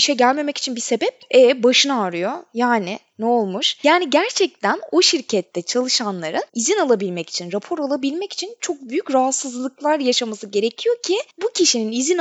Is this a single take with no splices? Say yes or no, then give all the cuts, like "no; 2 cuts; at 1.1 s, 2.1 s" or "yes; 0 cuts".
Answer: no; 2 cuts; at 6.5 s, 8.6 s